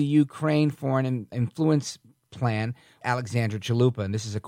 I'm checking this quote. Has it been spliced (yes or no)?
yes